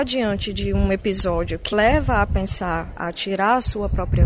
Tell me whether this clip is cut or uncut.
cut